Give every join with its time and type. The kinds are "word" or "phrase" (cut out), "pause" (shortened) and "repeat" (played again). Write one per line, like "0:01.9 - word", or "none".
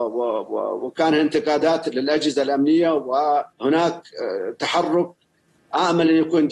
0:03.5 - pause

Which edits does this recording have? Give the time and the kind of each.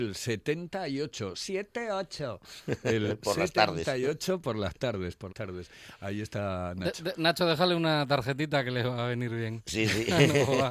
0:05.3 - word

